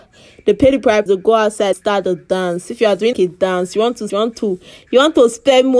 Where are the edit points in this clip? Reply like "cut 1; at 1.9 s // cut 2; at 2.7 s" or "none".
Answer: cut 1; at 1.1 s // cut 2; at 1.7 s // cut 3; at 3.1 s // cut 4; at 4.1 s